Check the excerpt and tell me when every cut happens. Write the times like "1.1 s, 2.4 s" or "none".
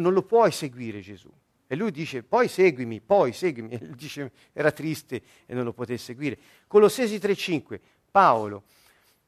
none